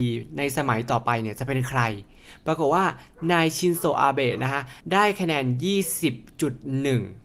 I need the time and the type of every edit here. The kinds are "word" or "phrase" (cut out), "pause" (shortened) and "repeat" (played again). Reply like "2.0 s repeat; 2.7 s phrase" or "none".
4.8 s pause